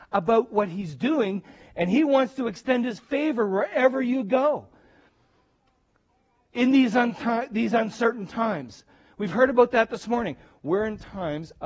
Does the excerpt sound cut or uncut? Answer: uncut